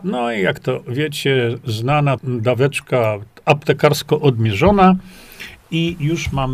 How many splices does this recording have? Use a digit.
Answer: 1